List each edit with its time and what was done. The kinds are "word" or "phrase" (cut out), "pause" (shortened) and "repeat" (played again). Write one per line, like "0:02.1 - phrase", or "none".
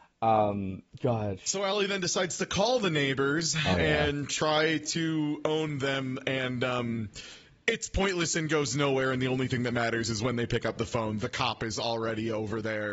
none